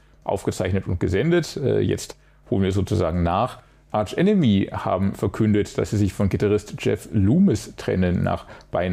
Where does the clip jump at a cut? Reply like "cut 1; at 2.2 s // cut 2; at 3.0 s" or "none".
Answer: none

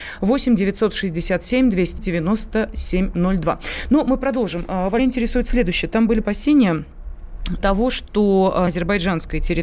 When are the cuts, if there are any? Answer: cut 1; at 2.0 s // cut 2; at 5.0 s // cut 3; at 6.2 s // cut 4; at 7.6 s // cut 5; at 8.7 s

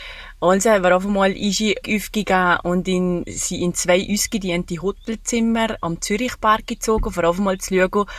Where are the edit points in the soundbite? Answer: cut 1; at 1.8 s

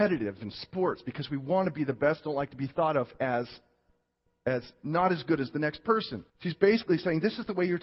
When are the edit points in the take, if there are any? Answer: cut 1; at 6.3 s

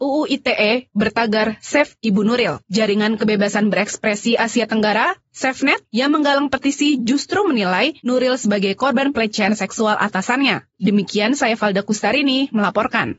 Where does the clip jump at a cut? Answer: cut 1; at 8.0 s

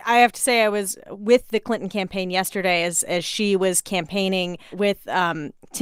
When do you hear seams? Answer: cut 1; at 4.7 s

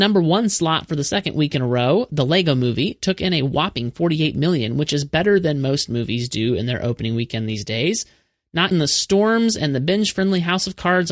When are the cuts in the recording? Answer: cut 1; at 8.7 s

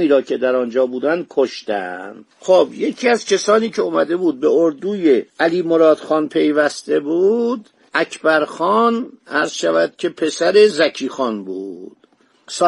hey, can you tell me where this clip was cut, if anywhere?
cut 1; at 2.3 s // cut 2; at 5.3 s

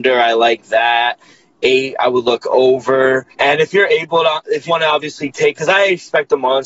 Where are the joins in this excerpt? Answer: cut 1; at 3.3 s // cut 2; at 4.7 s

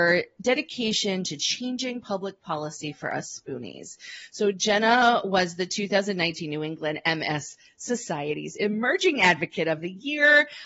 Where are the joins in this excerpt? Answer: none

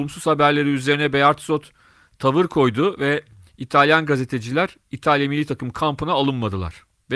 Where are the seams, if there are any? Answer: none

